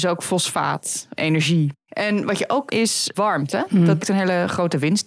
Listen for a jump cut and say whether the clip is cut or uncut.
cut